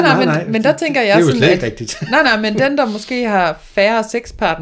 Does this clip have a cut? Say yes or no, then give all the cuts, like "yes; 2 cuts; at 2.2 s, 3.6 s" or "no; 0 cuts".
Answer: no; 0 cuts